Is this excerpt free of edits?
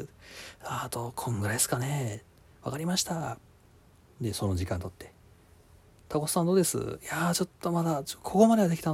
yes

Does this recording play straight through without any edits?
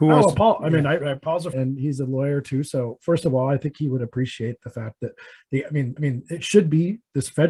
no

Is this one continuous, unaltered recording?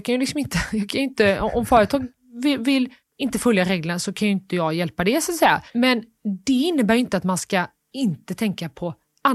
no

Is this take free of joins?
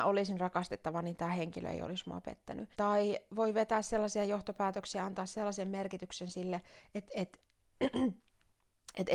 no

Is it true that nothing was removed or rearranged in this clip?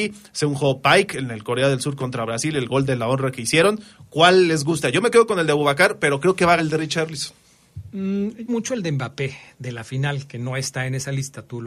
no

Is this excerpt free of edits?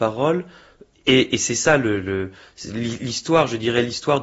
yes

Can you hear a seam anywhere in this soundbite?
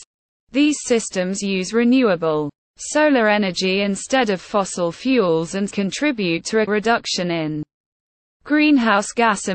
yes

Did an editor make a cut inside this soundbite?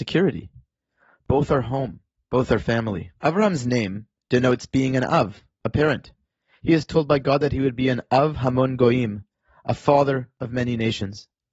yes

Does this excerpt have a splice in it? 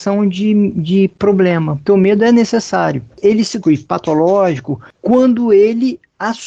yes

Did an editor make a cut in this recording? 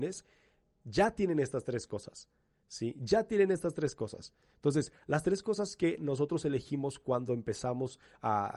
no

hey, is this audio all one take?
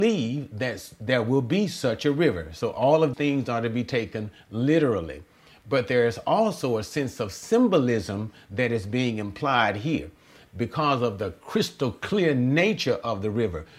no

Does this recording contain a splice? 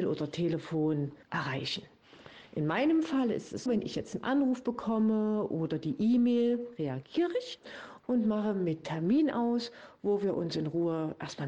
yes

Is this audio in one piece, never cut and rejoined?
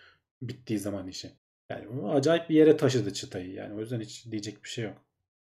no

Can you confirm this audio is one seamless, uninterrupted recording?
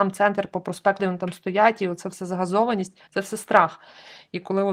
no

